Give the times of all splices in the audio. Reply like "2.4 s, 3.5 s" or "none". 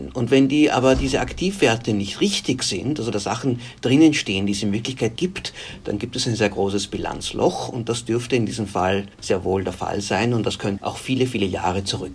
3.1 s, 5.2 s, 9.1 s, 10.8 s